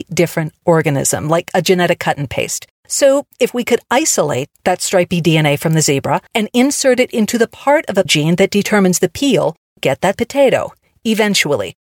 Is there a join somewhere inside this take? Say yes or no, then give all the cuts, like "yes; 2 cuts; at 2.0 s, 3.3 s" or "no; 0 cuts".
yes; 5 cuts; at 2.8 s, 6.3 s, 8.1 s, 9.8 s, 10.1 s